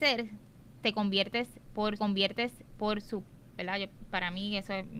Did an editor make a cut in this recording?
yes; 1 cut; at 2.0 s

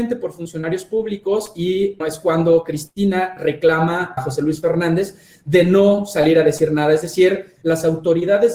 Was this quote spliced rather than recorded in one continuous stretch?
yes; 2 cuts; at 2.0 s, 4.2 s

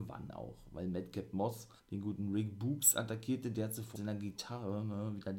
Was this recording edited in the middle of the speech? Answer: yes; 2 cuts; at 1.8 s, 4.0 s

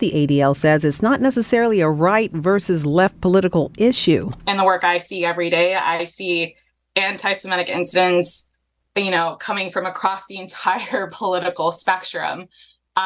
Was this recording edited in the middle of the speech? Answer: no; 0 cuts

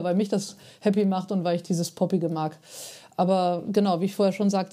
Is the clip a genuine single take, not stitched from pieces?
yes; 0 cuts

